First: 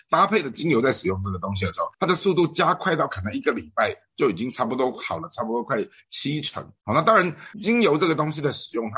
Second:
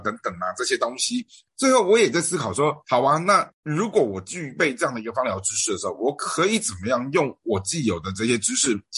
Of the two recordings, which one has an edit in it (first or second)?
first